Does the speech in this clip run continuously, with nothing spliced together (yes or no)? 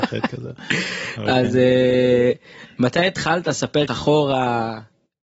no